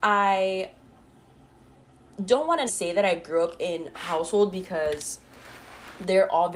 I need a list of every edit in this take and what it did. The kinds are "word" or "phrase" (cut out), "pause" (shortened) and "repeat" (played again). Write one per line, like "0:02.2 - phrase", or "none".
0:02.7 - word
0:03.9 - phrase